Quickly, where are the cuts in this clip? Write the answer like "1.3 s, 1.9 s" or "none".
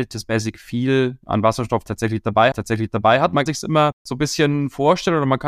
2.5 s, 3.5 s, 4.0 s